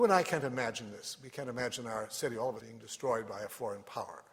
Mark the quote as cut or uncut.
cut